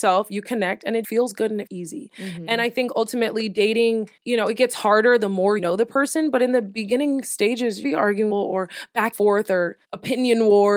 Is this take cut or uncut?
cut